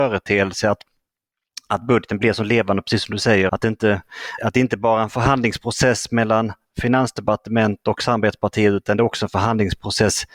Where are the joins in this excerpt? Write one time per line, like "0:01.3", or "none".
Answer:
0:03.5
0:04.4